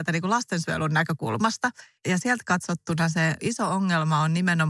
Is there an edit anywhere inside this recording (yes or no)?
no